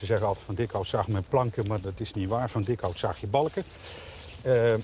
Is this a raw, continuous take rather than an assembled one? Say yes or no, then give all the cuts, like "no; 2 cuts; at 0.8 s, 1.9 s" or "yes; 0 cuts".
yes; 0 cuts